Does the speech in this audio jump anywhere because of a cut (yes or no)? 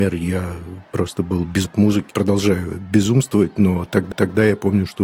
yes